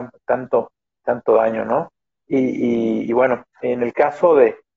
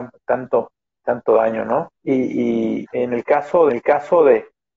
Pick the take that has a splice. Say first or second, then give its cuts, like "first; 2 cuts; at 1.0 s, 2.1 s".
second; 3 cuts; at 2.0 s, 2.8 s, 3.7 s